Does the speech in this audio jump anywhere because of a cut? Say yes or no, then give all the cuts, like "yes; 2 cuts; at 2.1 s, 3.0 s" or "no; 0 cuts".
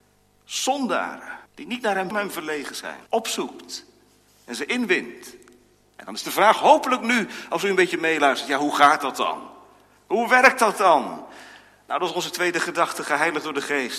yes; 3 cuts; at 1.5 s, 2.1 s, 3.1 s